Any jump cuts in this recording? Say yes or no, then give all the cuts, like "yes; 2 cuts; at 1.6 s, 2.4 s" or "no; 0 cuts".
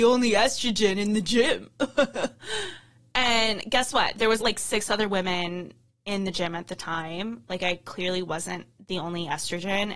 yes; 1 cut; at 4.4 s